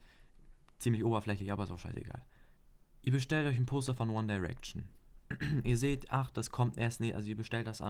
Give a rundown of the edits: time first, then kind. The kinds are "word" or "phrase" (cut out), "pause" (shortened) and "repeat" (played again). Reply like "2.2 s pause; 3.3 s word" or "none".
2.6 s pause